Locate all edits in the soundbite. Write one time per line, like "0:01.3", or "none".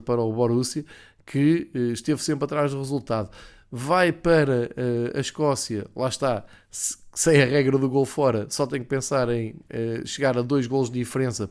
none